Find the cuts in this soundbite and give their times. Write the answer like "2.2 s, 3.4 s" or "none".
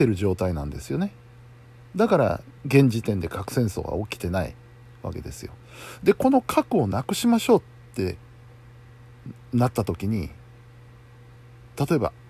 2.6 s